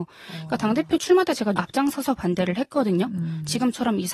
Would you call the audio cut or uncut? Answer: cut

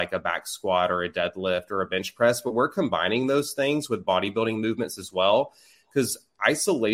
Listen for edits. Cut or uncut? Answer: uncut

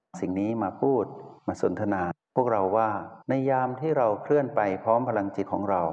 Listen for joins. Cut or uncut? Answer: cut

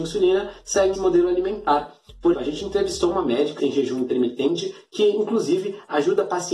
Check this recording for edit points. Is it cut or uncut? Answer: cut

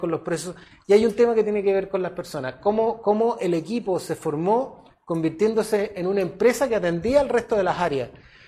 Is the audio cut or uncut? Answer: uncut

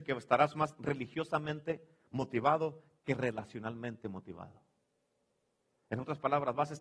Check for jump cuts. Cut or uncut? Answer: uncut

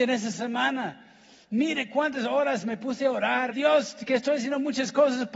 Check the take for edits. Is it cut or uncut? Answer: cut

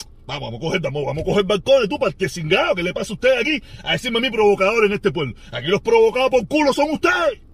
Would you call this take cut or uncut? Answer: uncut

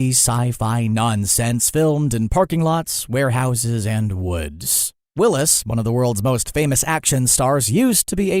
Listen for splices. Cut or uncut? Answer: uncut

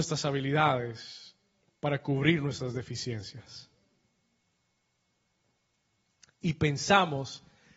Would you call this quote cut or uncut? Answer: uncut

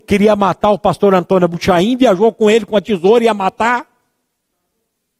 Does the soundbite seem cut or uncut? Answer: uncut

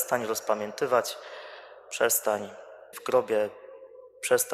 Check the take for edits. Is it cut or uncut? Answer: cut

